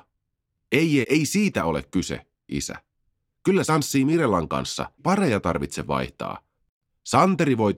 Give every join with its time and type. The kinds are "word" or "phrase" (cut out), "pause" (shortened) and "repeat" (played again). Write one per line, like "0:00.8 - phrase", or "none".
0:01.0 - word
0:02.5 - word
0:03.7 - word
0:05.0 - word